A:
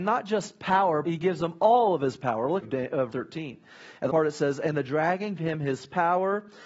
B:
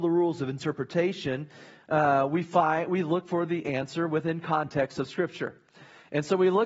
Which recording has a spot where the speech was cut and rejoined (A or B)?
A